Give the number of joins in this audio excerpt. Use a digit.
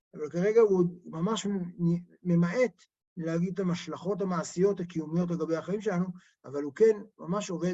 0